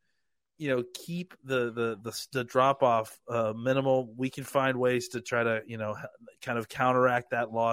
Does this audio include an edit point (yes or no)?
no